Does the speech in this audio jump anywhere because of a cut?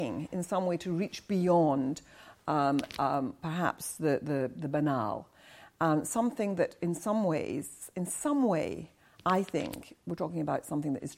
no; 0 cuts

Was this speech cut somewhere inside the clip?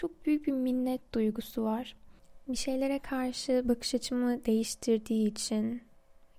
no; 0 cuts

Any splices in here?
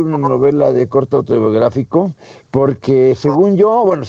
no; 0 cuts

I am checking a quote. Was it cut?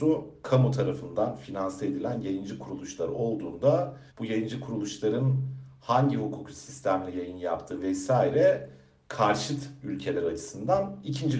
yes; 1 cut; at 4.1 s

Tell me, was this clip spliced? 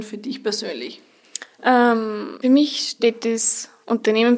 yes; 1 cut; at 2.4 s

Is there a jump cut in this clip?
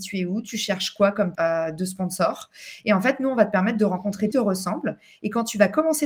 yes; 2 cuts; at 1.4 s, 4.3 s

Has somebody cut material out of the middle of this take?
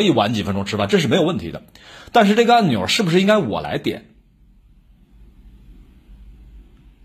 no; 0 cuts

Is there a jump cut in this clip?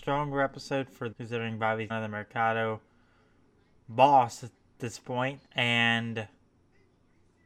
yes; 3 cuts; at 1.1 s, 1.9 s, 5.5 s

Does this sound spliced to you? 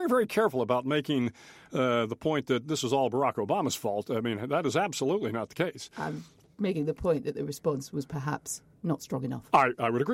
no; 0 cuts

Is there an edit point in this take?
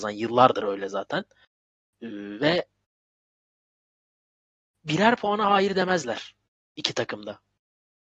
no; 0 cuts

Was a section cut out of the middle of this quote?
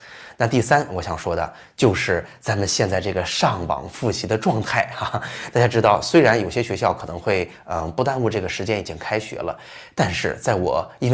no; 0 cuts

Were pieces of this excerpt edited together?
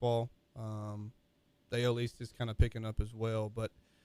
no; 0 cuts

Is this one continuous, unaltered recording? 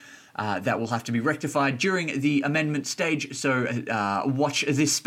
yes; 0 cuts

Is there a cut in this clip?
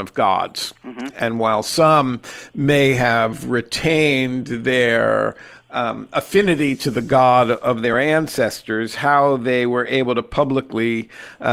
no; 0 cuts

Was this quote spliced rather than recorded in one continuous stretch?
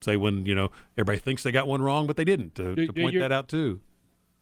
no; 0 cuts

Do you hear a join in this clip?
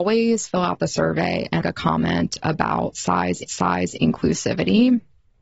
yes; 2 cuts; at 1.6 s, 3.5 s

